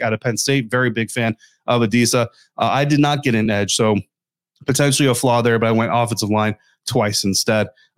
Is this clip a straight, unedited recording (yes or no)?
yes